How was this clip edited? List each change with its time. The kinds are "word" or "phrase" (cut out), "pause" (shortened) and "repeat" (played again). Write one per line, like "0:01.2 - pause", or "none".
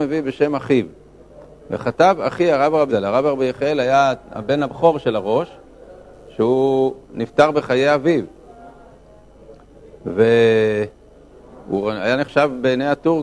0:02.9 - word